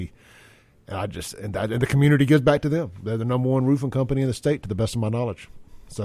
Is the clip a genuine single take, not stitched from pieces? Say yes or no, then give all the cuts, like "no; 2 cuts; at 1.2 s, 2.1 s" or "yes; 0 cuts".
yes; 0 cuts